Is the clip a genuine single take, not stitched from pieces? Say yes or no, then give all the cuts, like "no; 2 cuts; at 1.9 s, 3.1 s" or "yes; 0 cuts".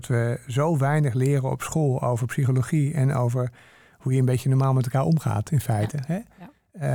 yes; 0 cuts